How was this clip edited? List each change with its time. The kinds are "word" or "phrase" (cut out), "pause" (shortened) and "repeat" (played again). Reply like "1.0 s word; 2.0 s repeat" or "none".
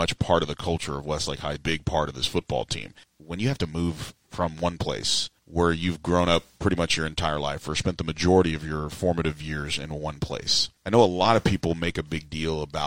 1.6 s phrase